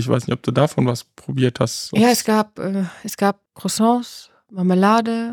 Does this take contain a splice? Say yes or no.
yes